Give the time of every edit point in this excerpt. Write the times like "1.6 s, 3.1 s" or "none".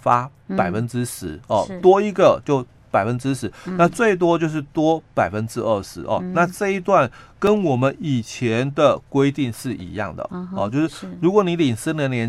none